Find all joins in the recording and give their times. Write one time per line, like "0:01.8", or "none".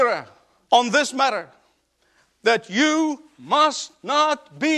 none